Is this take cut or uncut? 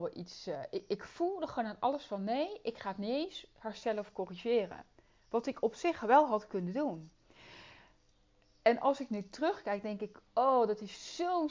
uncut